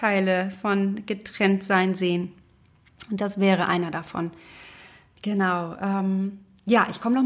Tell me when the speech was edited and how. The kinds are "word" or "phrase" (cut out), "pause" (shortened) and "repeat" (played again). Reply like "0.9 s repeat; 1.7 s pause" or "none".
none